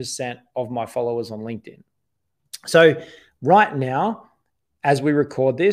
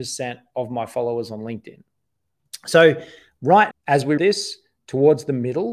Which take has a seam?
second; 2 cuts; at 3.7 s, 4.2 s

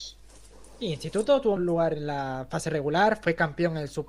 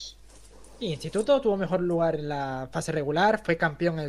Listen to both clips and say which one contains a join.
first; 1 cut; at 1.6 s

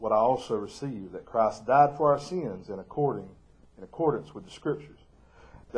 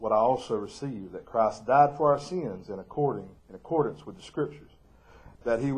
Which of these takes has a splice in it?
second; 1 cut; at 3.4 s

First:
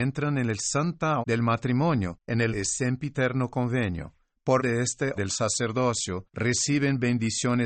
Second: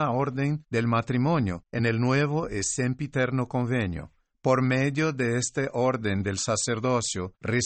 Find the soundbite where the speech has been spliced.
first; 4 cuts; at 1.2 s, 2.5 s, 4.6 s, 5.2 s

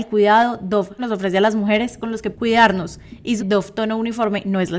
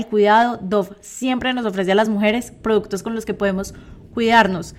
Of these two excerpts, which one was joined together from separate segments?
first; 4 cuts; at 1.0 s, 2.0 s, 2.3 s, 3.4 s

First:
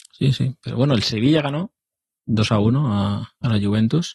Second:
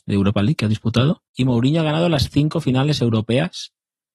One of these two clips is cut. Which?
second; 1 cut; at 1.3 s

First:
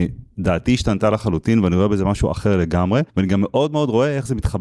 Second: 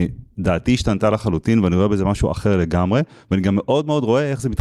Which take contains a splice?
first; 1 cut; at 3.1 s

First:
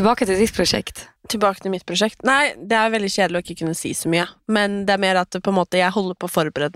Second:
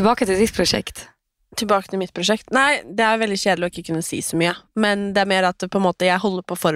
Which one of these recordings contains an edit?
first; 1 cut; at 1.2 s

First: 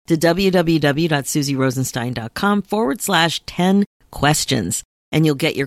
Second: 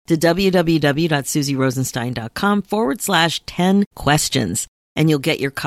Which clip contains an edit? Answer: second; 1 cut; at 3.9 s

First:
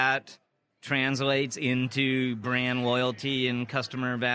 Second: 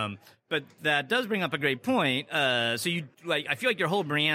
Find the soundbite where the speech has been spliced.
second; 1 cut; at 3.1 s

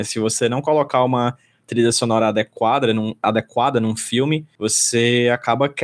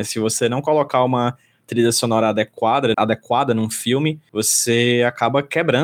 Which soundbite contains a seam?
second; 1 cut; at 2.9 s

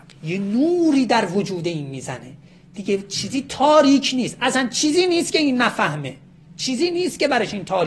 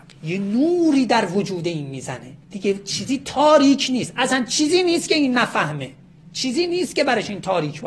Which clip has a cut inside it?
second; 1 cut; at 2.4 s

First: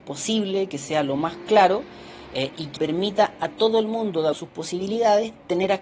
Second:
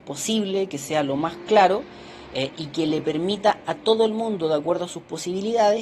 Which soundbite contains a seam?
first; 2 cuts; at 2.8 s, 4.3 s

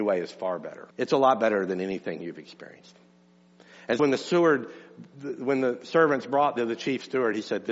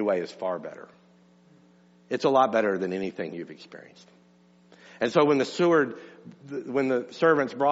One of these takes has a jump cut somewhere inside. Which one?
first; 3 cuts; at 0.9 s, 4.0 s, 6.6 s

